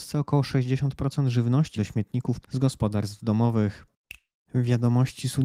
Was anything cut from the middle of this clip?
yes; 2 cuts; at 1.8 s, 2.4 s

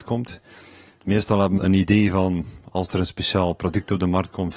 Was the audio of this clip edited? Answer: yes; 1 cut; at 1.6 s

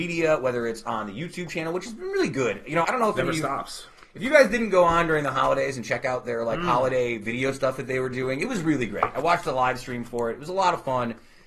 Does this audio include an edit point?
yes; 1 cut; at 2.8 s

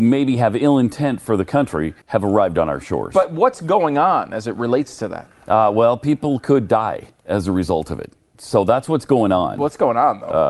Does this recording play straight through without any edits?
no; 1 cut; at 2.0 s

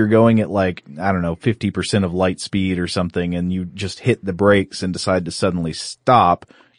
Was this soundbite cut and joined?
no; 0 cuts

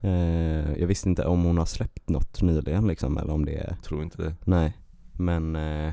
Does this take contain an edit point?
no; 0 cuts

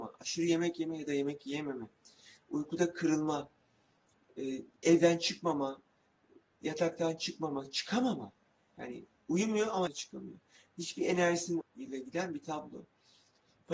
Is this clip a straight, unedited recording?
no; 3 cuts; at 4.8 s, 9.9 s, 11.6 s

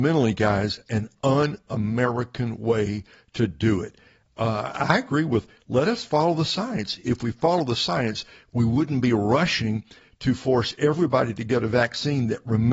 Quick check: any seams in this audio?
no; 0 cuts

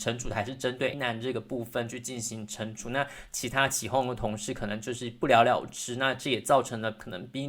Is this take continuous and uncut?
no; 1 cut; at 0.9 s

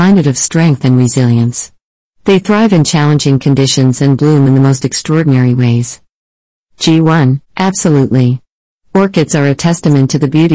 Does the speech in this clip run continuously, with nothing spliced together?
no; 1 cut; at 7.5 s

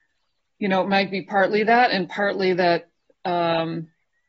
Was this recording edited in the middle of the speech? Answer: no; 0 cuts

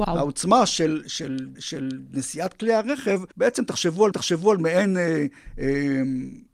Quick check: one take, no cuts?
no; 3 cuts; at 1.6 s, 3.3 s, 4.1 s

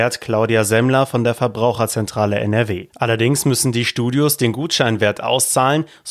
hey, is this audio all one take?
no; 1 cut; at 2.9 s

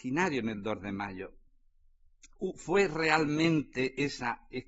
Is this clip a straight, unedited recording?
yes; 0 cuts

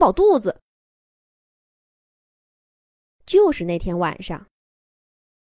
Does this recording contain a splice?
no; 0 cuts

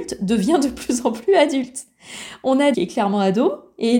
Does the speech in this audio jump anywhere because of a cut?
yes; 1 cut; at 2.7 s

